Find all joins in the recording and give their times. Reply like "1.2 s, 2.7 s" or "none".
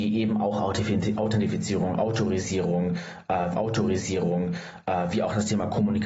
3.5 s